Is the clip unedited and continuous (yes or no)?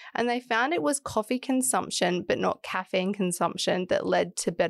yes